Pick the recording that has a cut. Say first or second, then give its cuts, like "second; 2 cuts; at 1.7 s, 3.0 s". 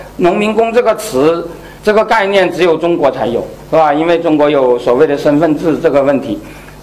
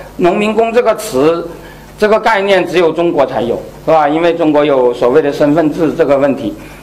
first; 1 cut; at 1.8 s